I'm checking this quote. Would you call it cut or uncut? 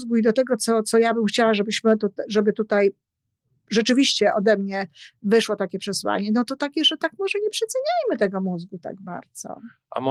uncut